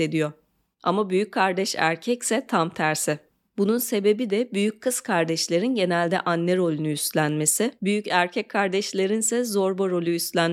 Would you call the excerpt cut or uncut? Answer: uncut